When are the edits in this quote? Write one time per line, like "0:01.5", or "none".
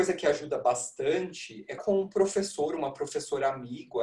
0:01.8

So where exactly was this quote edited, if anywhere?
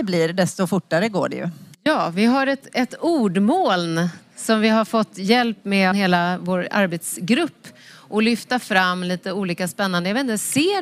0:05.9

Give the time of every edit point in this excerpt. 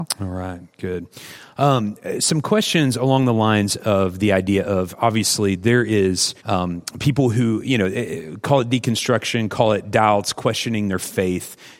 0:06.4

